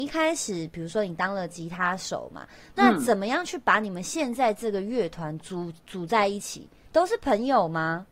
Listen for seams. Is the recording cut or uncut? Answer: uncut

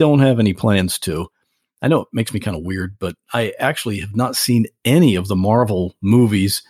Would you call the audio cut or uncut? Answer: uncut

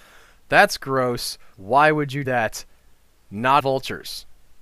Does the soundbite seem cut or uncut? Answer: cut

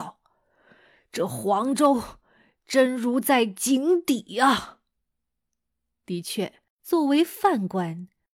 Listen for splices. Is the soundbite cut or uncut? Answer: cut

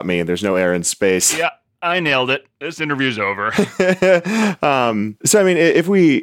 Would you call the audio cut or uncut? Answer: uncut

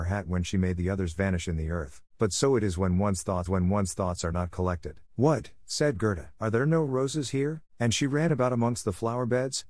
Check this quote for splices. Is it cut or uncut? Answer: cut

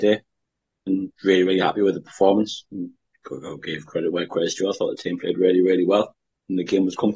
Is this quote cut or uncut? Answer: cut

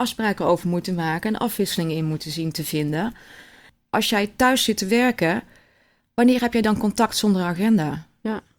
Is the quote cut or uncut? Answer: uncut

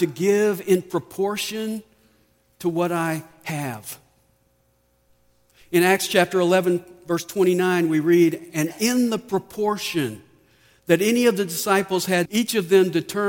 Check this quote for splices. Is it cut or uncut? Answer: cut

